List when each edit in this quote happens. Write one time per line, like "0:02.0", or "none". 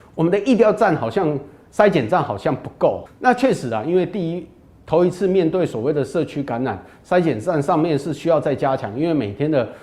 0:03.1